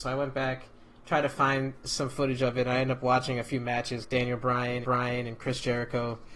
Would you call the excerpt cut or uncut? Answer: cut